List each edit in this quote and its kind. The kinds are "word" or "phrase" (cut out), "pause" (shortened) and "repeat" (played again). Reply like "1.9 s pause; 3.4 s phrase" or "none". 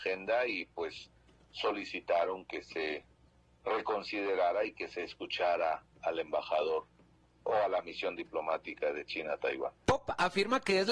none